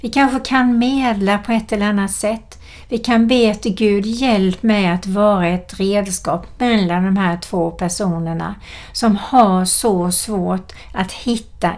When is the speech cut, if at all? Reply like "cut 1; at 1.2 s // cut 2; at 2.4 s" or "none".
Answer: none